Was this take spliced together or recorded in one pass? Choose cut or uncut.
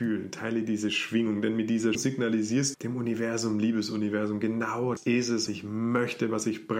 cut